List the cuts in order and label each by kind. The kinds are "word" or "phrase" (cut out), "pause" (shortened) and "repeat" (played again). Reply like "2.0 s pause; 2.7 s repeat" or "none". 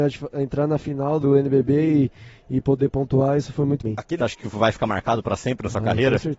1.2 s word; 3.8 s phrase; 4.2 s phrase